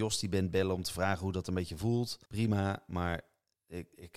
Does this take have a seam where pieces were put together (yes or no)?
yes